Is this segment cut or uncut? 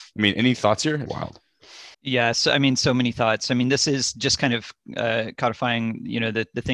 cut